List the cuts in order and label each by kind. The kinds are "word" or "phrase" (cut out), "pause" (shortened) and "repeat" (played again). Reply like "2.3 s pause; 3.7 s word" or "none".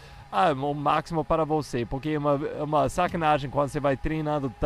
none